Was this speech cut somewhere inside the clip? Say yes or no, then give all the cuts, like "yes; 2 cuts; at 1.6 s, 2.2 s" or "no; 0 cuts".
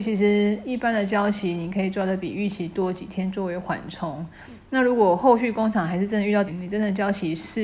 yes; 1 cut; at 6.5 s